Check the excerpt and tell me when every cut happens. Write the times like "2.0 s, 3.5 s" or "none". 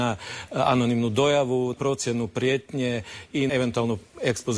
1.7 s, 3.5 s